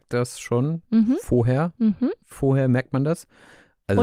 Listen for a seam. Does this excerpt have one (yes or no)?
yes